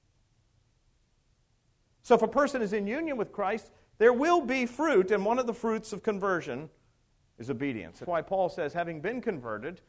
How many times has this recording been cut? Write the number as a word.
one